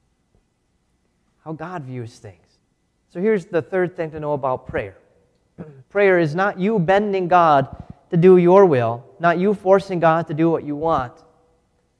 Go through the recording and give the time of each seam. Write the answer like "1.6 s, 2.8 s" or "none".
2.6 s, 5.8 s